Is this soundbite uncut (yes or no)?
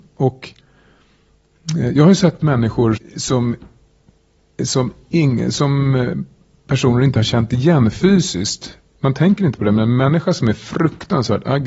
no